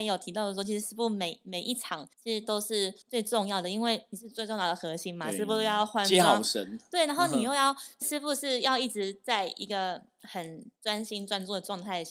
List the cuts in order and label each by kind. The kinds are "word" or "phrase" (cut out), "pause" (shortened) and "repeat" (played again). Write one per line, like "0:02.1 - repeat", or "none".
0:02.1 - pause
0:03.0 - pause
0:08.0 - word
0:10.8 - pause